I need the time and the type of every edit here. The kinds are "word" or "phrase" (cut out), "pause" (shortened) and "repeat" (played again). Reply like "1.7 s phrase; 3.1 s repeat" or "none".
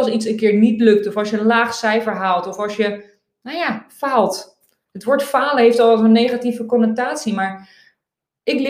none